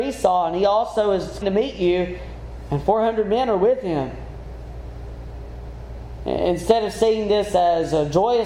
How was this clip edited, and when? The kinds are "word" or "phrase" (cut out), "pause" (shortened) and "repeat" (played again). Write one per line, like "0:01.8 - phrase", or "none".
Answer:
0:01.4 - word